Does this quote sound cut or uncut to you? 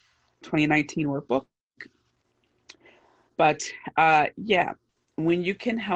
uncut